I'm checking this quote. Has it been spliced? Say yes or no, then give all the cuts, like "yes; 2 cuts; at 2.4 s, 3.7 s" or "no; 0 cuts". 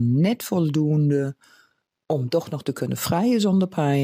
no; 0 cuts